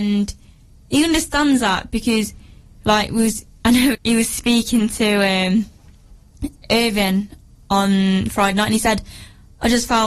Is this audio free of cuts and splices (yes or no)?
no